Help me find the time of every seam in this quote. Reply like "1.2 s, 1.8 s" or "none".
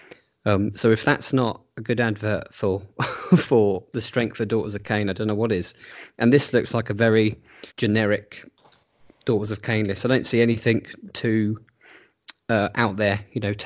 7.7 s